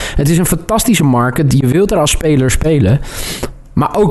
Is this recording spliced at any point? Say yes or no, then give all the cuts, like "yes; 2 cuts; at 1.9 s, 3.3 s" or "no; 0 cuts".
no; 0 cuts